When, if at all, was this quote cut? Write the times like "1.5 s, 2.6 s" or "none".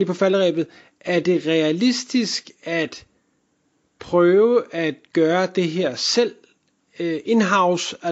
none